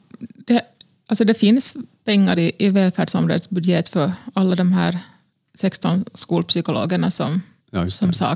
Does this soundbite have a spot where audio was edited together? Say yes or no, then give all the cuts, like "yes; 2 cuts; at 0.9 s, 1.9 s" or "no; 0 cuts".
no; 0 cuts